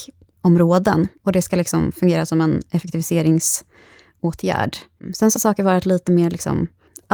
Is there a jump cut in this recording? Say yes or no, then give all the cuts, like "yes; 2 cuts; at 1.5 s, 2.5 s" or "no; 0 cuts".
yes; 1 cut; at 5.4 s